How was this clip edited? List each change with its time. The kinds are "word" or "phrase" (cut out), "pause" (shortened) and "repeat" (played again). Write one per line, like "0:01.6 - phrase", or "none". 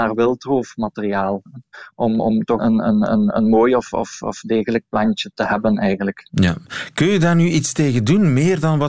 0:02.6 - word
0:05.3 - word